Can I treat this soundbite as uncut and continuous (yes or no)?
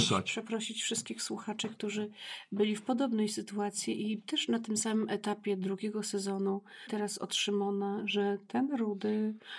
no